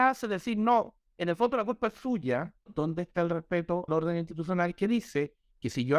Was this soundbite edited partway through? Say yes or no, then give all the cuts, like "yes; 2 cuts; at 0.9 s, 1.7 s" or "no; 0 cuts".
yes; 2 cuts; at 2.7 s, 3.9 s